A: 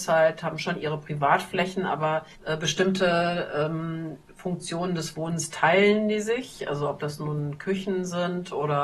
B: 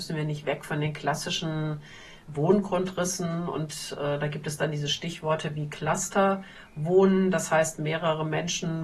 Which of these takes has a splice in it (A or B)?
A